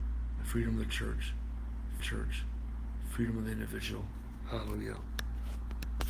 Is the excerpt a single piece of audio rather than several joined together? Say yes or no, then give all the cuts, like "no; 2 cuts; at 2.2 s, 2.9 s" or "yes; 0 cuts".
no; 1 cut; at 2.0 s